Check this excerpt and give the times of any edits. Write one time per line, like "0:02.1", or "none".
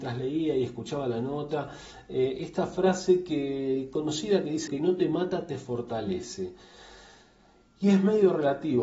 0:04.7